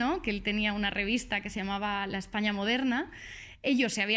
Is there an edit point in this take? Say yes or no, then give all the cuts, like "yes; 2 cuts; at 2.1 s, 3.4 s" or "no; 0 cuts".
no; 0 cuts